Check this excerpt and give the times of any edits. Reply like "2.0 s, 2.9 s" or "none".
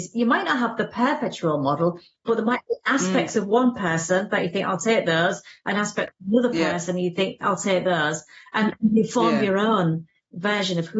none